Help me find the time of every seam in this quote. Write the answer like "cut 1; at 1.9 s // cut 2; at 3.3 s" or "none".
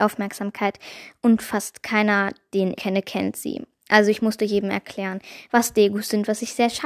cut 1; at 2.8 s